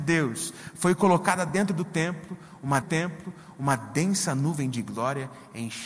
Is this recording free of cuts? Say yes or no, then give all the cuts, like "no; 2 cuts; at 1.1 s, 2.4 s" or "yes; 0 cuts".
no; 1 cut; at 2.8 s